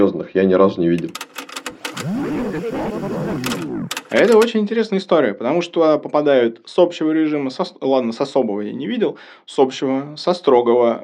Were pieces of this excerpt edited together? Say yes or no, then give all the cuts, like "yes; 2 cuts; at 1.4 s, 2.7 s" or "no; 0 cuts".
no; 0 cuts